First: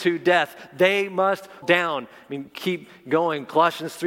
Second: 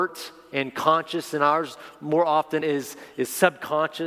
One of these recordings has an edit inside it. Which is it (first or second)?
first